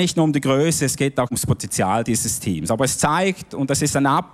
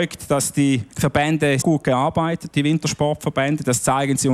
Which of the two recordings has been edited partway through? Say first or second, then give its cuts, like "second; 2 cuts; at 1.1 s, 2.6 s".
second; 2 cuts; at 1.6 s, 2.5 s